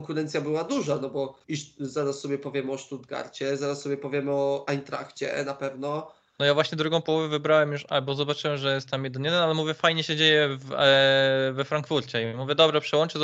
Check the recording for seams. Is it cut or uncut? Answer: cut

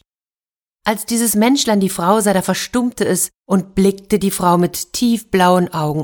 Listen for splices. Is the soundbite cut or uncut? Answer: cut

